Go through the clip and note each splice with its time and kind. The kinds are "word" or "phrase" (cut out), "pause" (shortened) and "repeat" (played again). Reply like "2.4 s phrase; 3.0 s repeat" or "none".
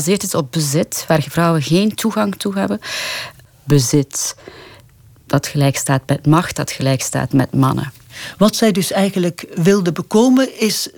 none